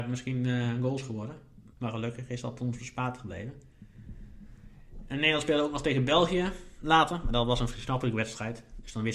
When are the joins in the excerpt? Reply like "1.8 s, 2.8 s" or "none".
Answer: 1.7 s